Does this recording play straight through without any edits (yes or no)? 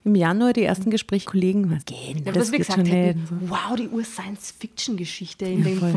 no